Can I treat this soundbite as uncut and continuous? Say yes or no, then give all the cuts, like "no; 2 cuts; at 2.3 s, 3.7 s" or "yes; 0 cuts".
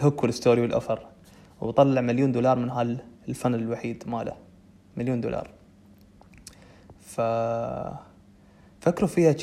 yes; 0 cuts